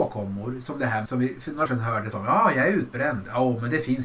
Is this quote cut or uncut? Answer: cut